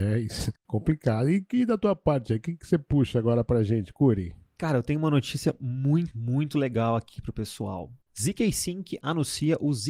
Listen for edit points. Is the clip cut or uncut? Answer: cut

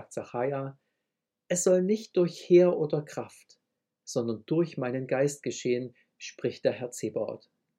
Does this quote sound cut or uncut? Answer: uncut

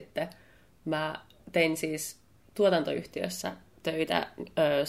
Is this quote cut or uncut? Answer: uncut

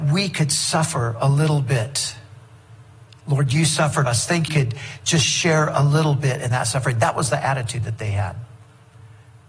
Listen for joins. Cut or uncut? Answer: cut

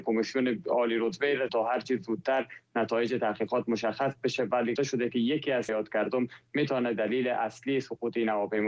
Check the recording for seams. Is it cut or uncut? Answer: cut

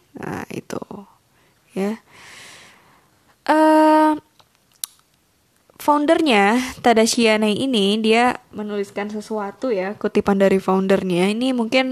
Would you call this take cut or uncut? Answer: uncut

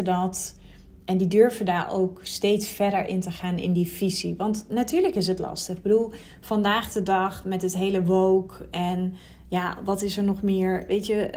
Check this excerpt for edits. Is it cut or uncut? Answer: uncut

